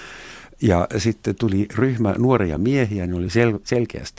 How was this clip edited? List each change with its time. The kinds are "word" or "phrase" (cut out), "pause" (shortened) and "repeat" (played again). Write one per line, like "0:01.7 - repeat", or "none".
none